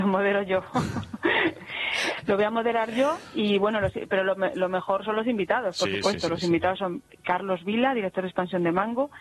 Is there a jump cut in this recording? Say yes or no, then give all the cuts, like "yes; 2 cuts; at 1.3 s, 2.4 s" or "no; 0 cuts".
no; 0 cuts